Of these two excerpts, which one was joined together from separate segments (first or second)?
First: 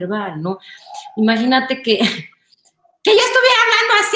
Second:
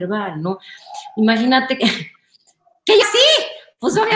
second